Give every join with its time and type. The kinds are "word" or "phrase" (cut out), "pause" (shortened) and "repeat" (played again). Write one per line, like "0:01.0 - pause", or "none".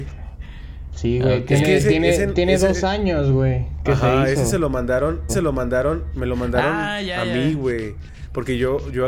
0:05.3 - repeat

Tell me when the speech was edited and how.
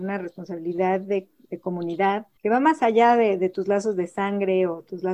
0:02.4 - pause

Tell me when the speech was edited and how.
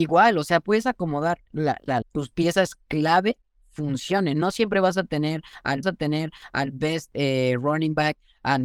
0:02.0 - phrase
0:05.8 - repeat

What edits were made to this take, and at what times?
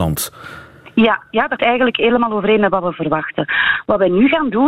0:01.6 - word

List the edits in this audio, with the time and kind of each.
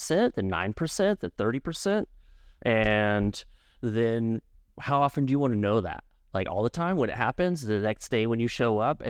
none

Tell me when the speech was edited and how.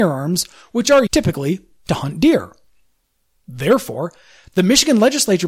0:01.1 - word

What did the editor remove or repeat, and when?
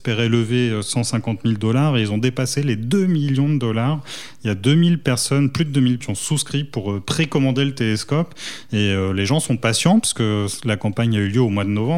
0:06.0 - word

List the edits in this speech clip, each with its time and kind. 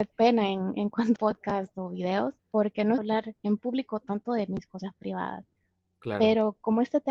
0:01.2 - phrase
0:02.4 - pause
0:03.0 - phrase

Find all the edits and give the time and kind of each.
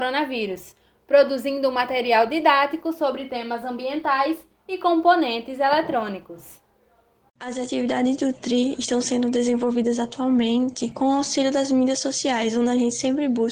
none

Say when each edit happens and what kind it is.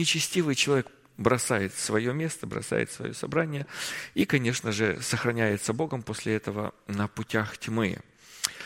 none

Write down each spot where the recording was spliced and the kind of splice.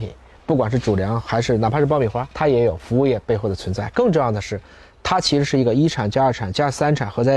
0:02.3 - pause

